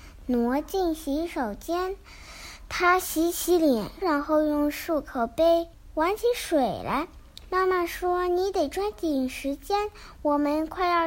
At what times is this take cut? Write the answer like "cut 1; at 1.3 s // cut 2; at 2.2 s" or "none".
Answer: cut 1; at 4.0 s